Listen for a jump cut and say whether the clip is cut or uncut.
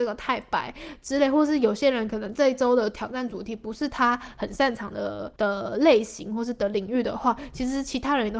cut